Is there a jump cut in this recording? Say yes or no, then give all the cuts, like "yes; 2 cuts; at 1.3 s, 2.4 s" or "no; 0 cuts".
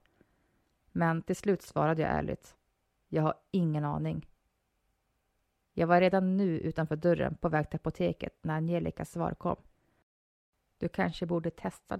no; 0 cuts